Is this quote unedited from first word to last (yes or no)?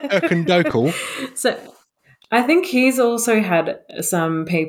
yes